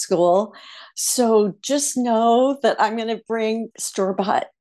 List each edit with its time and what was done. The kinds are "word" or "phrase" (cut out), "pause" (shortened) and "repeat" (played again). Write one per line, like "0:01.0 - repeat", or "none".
0:03.7 - pause